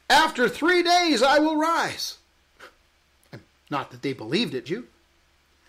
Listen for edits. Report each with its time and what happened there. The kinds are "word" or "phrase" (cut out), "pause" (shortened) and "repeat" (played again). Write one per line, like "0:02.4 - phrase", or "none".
0:04.7 - word